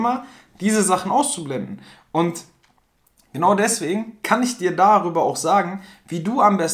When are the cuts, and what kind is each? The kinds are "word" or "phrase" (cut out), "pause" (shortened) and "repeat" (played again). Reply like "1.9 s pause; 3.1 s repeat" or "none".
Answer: none